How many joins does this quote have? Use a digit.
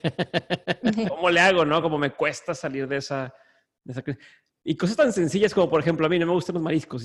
0